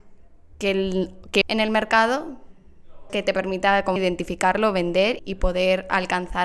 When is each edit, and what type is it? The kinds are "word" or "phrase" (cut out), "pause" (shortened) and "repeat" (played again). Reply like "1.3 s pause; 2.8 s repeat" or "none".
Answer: 1.4 s word; 3.1 s word; 4.0 s word; 5.2 s word